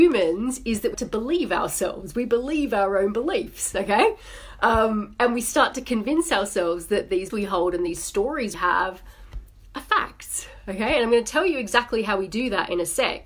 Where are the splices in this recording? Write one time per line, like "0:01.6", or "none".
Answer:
0:00.9
0:07.3
0:08.5